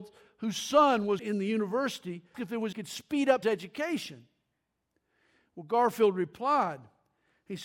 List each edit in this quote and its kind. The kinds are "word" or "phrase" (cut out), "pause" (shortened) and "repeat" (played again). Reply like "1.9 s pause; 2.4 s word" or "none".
1.2 s word; 2.3 s word; 2.7 s phrase; 3.4 s phrase